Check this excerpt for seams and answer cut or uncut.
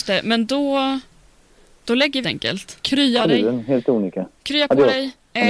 cut